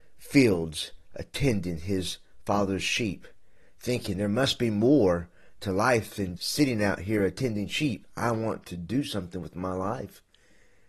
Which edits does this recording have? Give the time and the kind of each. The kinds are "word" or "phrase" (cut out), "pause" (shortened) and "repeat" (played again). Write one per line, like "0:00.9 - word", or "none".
0:06.4 - word